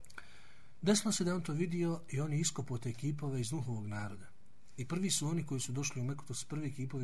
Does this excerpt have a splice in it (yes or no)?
no